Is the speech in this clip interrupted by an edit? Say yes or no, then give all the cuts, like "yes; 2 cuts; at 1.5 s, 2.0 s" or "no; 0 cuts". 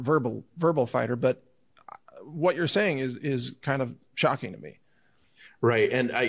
no; 0 cuts